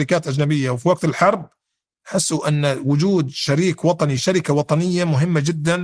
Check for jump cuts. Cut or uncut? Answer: uncut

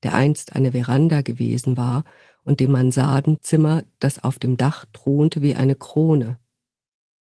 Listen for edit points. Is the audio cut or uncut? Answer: uncut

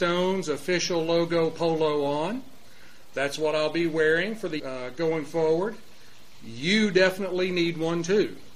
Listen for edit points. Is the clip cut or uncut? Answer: cut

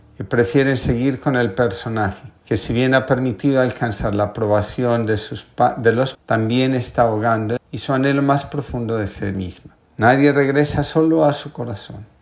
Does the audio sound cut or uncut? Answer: cut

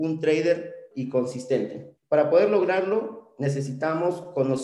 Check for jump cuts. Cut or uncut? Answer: cut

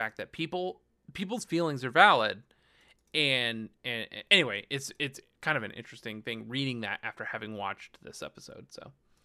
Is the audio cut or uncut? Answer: uncut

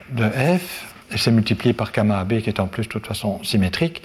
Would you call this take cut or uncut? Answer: cut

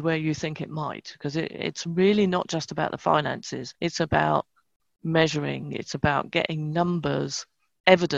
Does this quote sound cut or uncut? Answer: cut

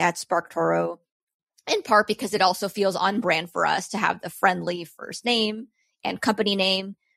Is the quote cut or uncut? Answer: uncut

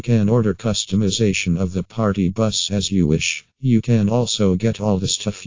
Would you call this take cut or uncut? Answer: cut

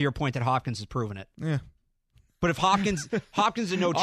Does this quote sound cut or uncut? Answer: cut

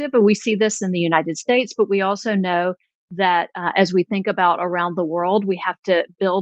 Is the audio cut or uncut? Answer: uncut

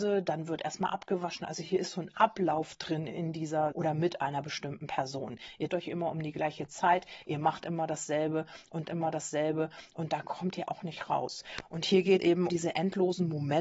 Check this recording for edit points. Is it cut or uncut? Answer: cut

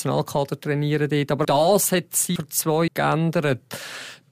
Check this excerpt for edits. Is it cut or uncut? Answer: cut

